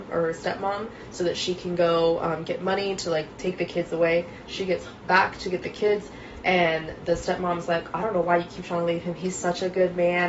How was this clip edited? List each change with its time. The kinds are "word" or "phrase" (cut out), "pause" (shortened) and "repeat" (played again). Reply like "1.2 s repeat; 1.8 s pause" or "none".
none